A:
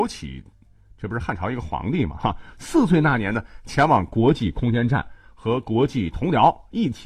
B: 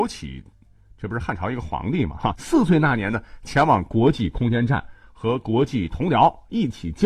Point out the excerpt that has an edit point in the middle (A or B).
B